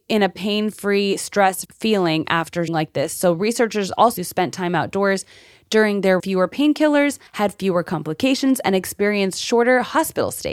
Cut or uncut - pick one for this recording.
cut